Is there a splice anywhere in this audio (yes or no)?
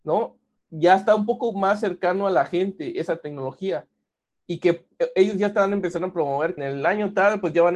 yes